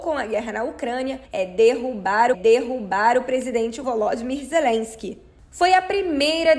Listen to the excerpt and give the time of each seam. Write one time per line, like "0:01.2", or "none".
0:01.2
0:02.3
0:03.8